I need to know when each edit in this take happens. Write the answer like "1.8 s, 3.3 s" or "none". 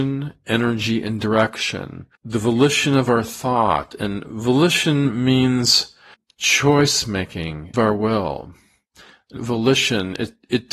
2.1 s, 6.1 s, 7.7 s, 9.4 s